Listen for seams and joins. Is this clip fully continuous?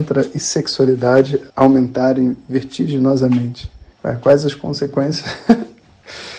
no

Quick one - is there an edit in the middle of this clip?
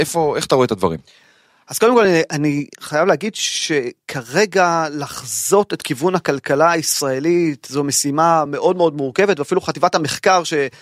no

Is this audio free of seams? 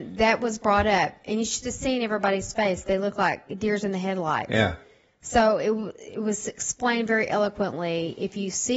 yes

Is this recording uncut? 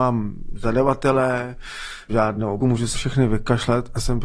no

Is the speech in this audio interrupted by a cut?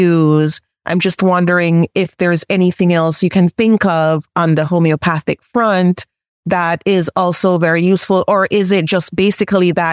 no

